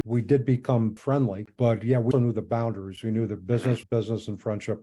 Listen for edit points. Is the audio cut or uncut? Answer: cut